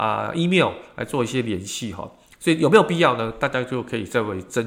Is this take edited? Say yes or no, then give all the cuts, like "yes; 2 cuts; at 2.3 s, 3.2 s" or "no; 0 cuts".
no; 0 cuts